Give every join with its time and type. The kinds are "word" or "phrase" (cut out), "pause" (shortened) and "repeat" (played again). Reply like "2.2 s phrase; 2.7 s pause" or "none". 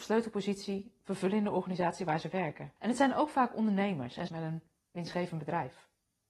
2.8 s pause; 4.3 s word